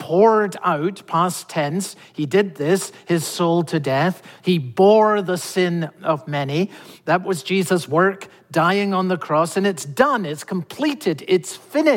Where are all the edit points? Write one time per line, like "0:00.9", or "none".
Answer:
none